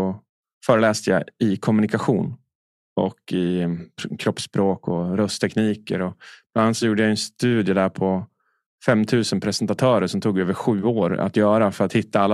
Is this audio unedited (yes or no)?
yes